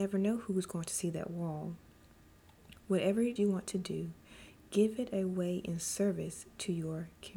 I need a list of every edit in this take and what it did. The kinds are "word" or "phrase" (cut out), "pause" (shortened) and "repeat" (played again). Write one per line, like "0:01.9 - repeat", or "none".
0:03.4 - word